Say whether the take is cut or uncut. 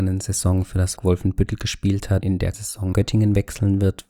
cut